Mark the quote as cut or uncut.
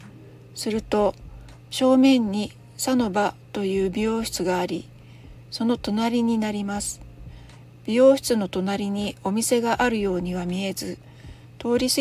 uncut